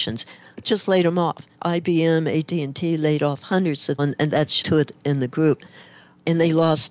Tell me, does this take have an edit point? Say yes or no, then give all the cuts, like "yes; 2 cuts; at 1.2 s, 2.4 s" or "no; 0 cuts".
yes; 3 cuts; at 1.5 s, 4.0 s, 4.6 s